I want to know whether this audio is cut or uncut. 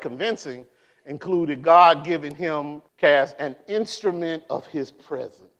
cut